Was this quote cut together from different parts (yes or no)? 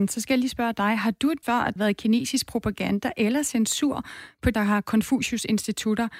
yes